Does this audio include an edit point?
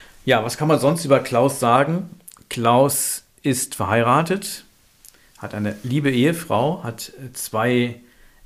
no; 0 cuts

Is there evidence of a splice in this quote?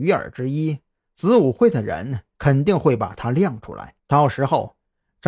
yes; 1 cut; at 4.0 s

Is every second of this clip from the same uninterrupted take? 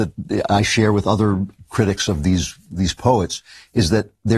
yes; 0 cuts

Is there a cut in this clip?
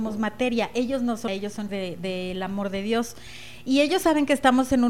yes; 2 cuts; at 1.3 s, 1.7 s

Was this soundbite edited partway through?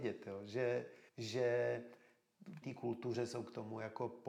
yes; 2 cuts; at 1.1 s, 2.6 s

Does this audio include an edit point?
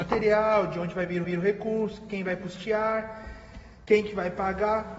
yes; 1 cut; at 1.2 s

